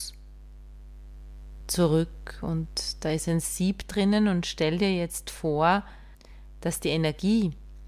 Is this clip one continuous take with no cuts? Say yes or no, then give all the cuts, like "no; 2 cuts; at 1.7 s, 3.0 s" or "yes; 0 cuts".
yes; 0 cuts